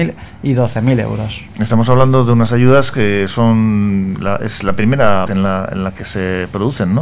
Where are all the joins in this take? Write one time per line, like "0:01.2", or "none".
0:05.3